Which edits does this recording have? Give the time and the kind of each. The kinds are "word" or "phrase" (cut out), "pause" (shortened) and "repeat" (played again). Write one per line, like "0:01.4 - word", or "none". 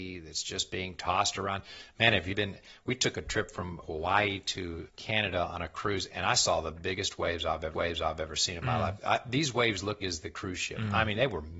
0:02.3 - word
0:03.8 - word
0:04.9 - word
0:07.7 - repeat
0:10.0 - phrase